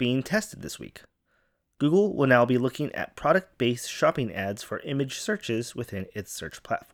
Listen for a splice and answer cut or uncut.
uncut